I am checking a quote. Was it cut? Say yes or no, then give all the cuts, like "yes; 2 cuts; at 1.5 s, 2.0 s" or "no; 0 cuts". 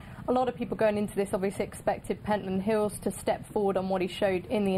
no; 0 cuts